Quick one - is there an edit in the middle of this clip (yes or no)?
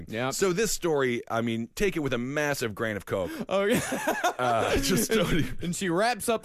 no